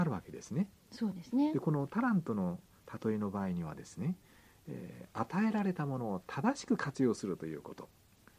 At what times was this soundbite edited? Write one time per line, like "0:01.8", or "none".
none

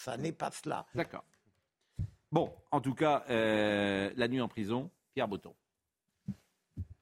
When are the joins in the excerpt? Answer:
none

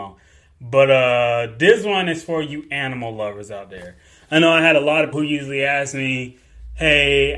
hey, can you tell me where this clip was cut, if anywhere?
0:05.1

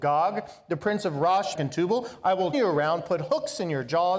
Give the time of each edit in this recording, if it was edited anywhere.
0:01.5
0:02.5

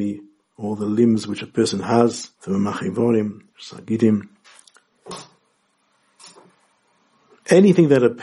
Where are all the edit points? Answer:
0:02.3
0:03.5

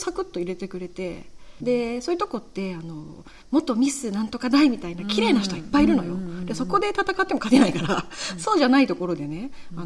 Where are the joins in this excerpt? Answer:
0:01.6
0:03.4

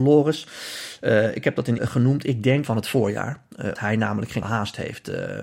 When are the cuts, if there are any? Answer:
0:01.8
0:02.6
0:03.8
0:04.4

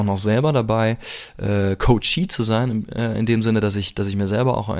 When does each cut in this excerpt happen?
none

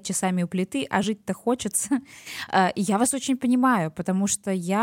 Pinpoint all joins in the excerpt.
none

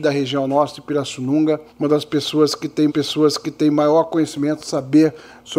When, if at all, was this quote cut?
0:01.7
0:02.9

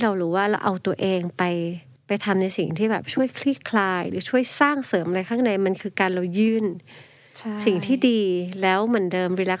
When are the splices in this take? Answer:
0:02.0

